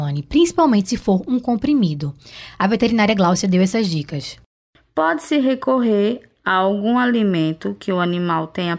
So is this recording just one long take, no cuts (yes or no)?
yes